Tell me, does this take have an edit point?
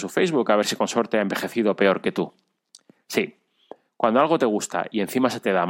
no; 0 cuts

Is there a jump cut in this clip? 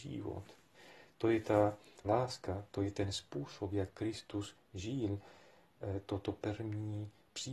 yes; 1 cut; at 2.0 s

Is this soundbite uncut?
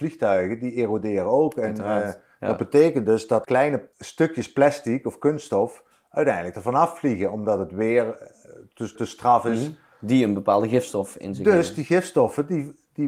no; 2 cuts; at 3.4 s, 9.0 s

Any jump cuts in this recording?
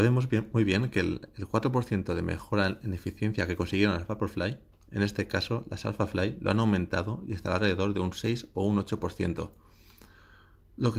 no; 0 cuts

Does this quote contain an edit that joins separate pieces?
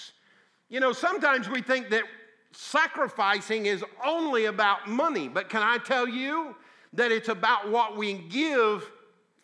no; 0 cuts

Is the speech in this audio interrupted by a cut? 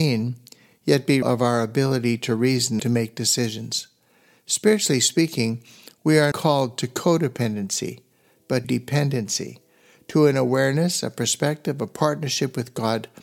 yes; 4 cuts; at 1.2 s, 2.8 s, 6.3 s, 8.6 s

